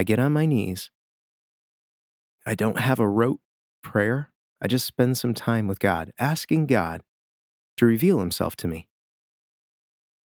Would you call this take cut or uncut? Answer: uncut